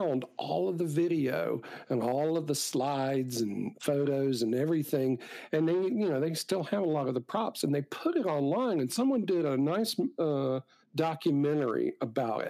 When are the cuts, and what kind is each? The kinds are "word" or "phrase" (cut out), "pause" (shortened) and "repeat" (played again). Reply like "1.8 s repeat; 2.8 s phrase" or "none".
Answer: 10.8 s pause